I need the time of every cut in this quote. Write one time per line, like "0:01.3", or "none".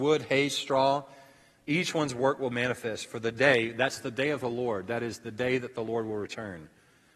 0:02.5